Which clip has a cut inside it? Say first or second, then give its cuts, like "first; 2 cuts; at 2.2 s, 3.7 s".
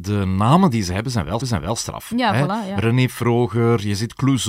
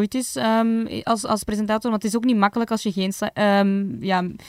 first; 1 cut; at 1.4 s